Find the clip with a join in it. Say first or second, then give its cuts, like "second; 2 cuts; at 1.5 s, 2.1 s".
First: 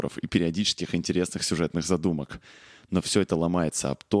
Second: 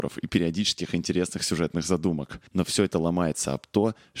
second; 1 cut; at 2.5 s